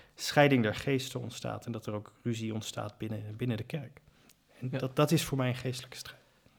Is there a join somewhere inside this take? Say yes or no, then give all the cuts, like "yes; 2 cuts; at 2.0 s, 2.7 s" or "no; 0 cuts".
no; 0 cuts